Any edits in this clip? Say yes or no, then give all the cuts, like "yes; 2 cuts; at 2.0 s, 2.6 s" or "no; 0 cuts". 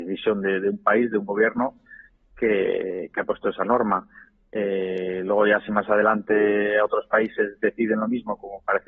no; 0 cuts